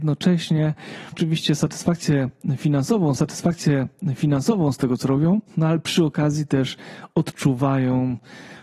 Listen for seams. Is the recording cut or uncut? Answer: cut